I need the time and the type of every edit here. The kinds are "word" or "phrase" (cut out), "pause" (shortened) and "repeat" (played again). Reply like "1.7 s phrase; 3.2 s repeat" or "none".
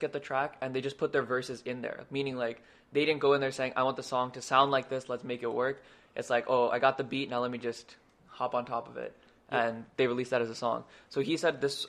none